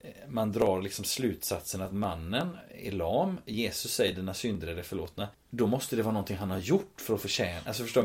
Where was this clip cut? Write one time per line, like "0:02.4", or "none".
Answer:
0:05.3